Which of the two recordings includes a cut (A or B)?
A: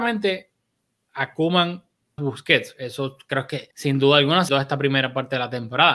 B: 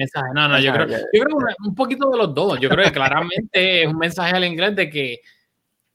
A